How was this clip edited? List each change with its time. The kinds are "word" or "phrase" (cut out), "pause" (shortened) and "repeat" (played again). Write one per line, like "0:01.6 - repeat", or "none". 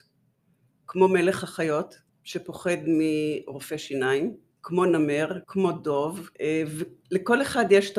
0:02.1 - pause
0:04.5 - pause
0:05.4 - pause
0:06.3 - pause